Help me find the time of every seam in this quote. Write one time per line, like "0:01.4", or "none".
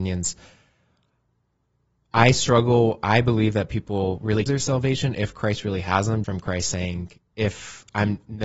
0:04.5
0:06.2